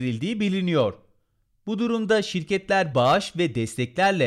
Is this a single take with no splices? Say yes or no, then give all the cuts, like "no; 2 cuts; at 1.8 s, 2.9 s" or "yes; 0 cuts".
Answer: no; 1 cut; at 2.9 s